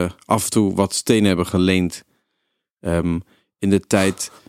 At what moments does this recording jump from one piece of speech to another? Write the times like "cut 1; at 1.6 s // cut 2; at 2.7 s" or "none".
none